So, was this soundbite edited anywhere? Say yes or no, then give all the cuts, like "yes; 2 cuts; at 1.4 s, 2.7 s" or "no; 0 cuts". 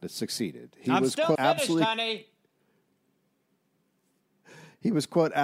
yes; 1 cut; at 1.4 s